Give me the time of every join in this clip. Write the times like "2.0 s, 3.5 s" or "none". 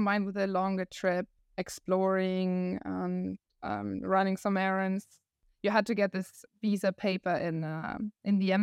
none